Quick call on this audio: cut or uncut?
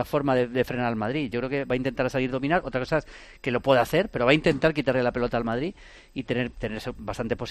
uncut